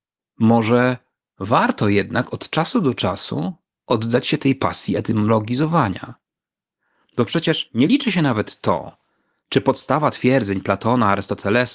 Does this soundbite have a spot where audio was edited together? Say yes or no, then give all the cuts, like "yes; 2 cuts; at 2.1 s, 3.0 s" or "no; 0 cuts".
no; 0 cuts